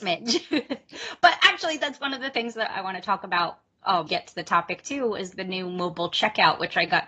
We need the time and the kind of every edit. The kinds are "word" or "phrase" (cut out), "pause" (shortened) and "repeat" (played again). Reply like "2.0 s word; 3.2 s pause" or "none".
4.1 s phrase